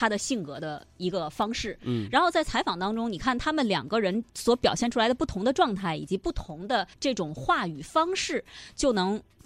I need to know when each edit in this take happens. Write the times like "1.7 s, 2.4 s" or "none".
4.3 s, 6.9 s